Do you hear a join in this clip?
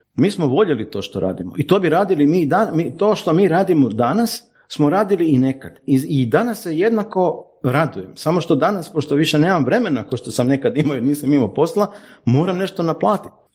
no; 0 cuts

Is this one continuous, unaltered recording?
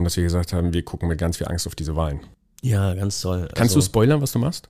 yes; 0 cuts

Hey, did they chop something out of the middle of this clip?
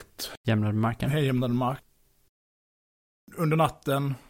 no; 0 cuts

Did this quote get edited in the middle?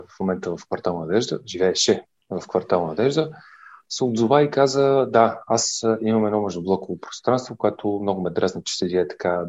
no; 0 cuts

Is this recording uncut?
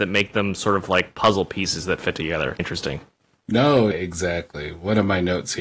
no; 2 cuts; at 2.6 s, 3.9 s

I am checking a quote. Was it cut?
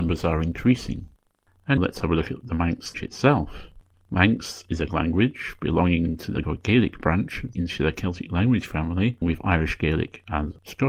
yes; 6 cuts; at 1.8 s, 2.9 s, 4.9 s, 6.4 s, 7.5 s, 9.2 s

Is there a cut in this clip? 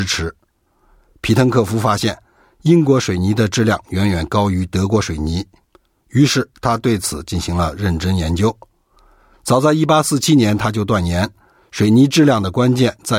no; 0 cuts

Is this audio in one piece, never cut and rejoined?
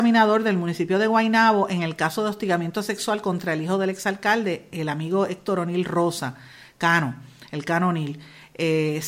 yes; 0 cuts

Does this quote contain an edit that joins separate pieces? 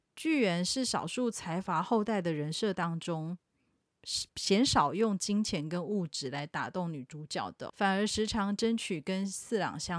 yes; 2 cuts; at 4.3 s, 7.7 s

